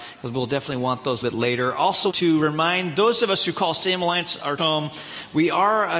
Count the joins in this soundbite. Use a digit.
3